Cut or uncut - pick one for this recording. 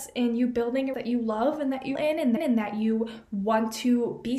cut